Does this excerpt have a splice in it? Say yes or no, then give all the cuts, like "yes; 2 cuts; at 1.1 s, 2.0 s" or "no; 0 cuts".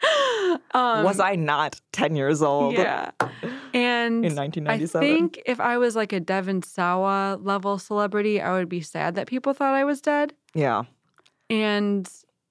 yes; 1 cut; at 1.8 s